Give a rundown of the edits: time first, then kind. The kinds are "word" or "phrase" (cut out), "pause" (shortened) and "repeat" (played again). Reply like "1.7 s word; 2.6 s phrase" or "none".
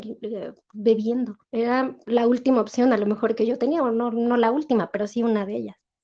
1.4 s pause

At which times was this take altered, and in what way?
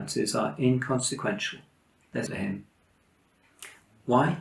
2.3 s phrase

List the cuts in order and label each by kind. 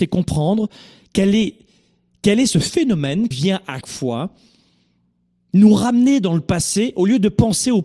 3.3 s word; 3.8 s word

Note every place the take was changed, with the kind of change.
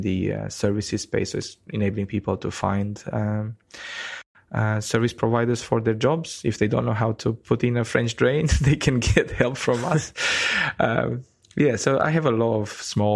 none

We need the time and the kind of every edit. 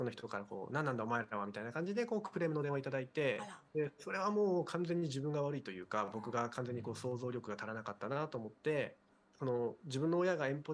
3.7 s pause; 9.1 s pause

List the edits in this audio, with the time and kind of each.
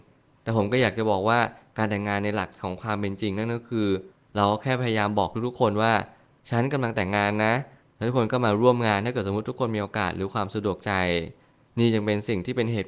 none

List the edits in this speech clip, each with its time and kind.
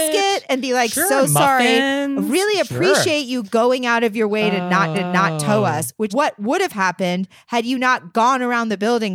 4.9 s repeat; 6.1 s word

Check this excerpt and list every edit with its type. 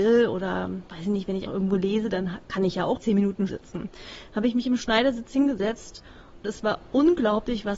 1.5 s word; 3.0 s word; 3.5 s word; 6.4 s word

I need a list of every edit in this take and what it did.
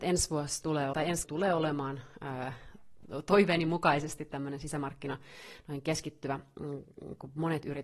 0.9 s word; 1.2 s word

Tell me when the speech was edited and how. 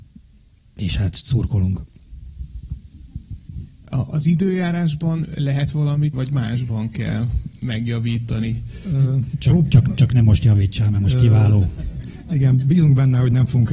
6.1 s word

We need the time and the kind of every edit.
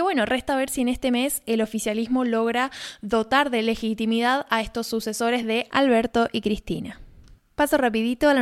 none

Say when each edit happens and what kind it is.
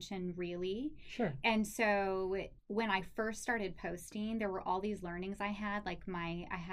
2.6 s pause

